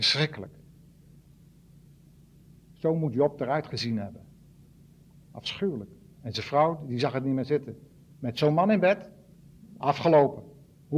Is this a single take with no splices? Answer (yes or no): yes